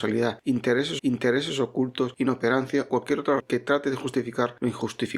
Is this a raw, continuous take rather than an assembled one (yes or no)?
no